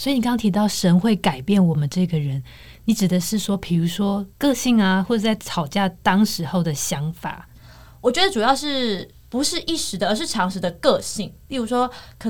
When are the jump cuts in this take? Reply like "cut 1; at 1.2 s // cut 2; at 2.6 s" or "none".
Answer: cut 1; at 4.3 s // cut 2; at 9.1 s